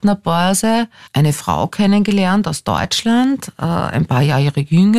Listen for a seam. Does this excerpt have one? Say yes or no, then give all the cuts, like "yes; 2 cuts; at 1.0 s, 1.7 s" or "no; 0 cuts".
no; 0 cuts